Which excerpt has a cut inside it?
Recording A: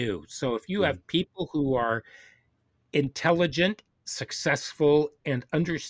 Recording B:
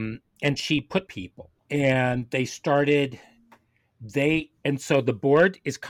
B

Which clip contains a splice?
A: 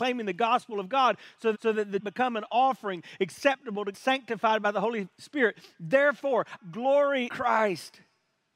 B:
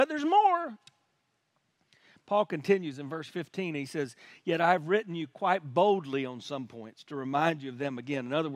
A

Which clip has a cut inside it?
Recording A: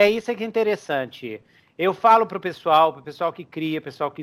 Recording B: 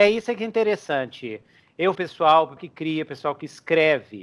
B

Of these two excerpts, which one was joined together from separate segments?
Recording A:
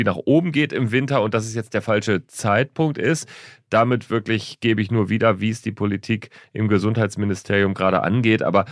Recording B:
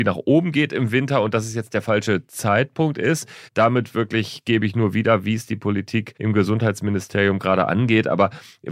B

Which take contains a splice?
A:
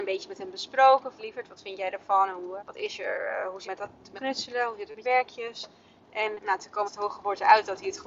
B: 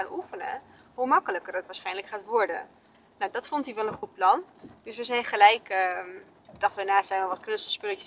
A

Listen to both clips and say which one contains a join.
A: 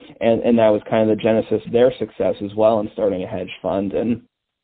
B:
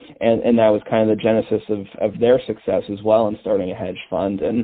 A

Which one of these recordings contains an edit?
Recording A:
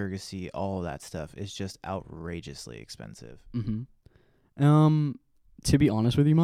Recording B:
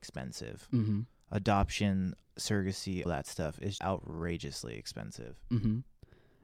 B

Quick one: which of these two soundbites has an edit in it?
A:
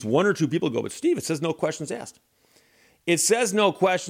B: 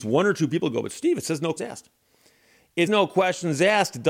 B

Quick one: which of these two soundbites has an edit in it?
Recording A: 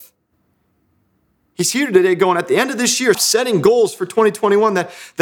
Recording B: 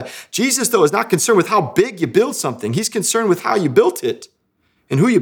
A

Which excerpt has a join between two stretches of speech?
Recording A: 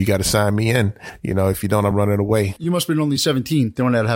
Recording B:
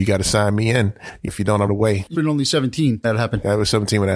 B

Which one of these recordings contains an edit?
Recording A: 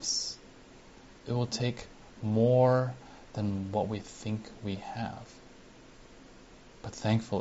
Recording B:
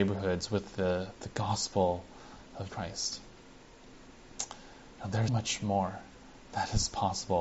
B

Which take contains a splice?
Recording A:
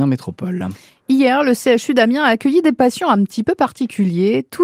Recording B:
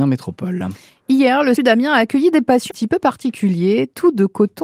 B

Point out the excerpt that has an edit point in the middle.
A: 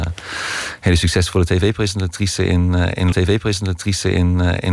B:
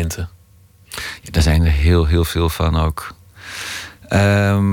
A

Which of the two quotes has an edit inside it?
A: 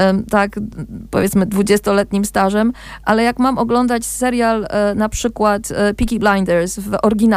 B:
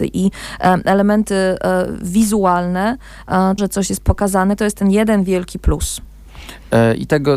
B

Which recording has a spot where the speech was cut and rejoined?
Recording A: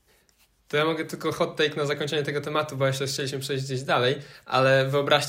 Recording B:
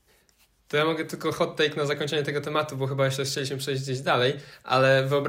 A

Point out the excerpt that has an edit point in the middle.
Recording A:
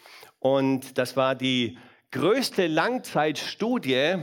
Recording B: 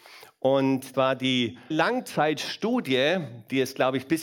B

